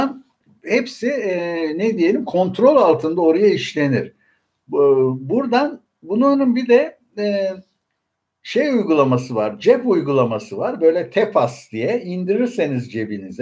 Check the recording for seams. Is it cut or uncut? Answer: uncut